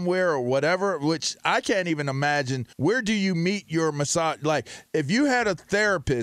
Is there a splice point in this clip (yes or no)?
yes